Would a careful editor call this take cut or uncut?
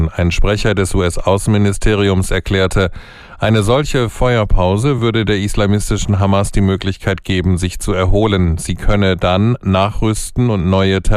uncut